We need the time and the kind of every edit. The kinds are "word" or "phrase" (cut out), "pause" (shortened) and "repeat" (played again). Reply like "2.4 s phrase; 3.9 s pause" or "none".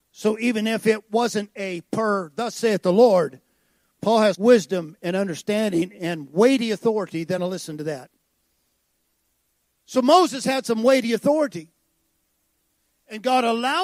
4.3 s word; 7.4 s phrase

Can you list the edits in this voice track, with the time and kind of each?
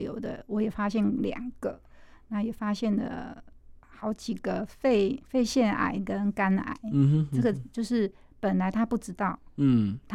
3.8 s pause

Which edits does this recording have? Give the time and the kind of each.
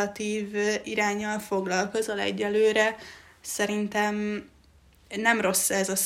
none

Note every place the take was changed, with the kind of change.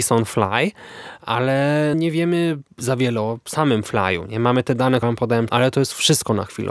1.9 s word; 5.0 s word; 5.5 s phrase

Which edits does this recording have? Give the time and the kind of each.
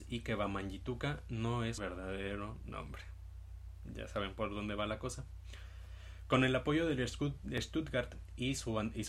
1.8 s word

